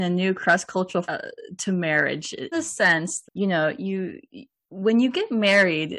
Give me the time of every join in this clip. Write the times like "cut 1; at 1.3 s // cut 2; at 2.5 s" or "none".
cut 1; at 1.0 s // cut 2; at 2.5 s // cut 3; at 3.2 s